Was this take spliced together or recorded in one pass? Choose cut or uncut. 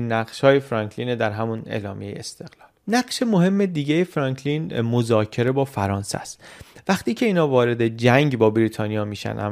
cut